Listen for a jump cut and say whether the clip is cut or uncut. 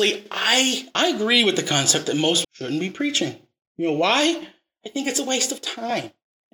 cut